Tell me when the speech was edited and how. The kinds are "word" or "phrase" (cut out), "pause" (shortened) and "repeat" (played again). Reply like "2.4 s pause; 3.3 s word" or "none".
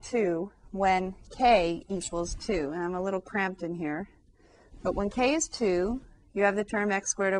none